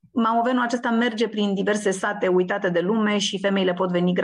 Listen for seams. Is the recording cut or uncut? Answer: uncut